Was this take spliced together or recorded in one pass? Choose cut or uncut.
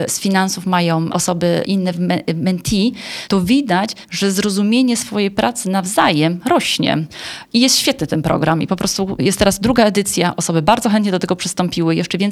cut